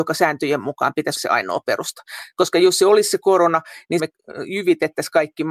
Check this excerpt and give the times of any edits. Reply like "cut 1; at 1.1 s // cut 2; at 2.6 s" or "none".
cut 1; at 1.2 s // cut 2; at 4.0 s

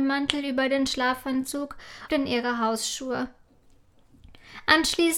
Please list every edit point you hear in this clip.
cut 1; at 2.1 s

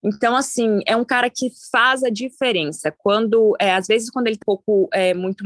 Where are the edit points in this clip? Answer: cut 1; at 4.4 s

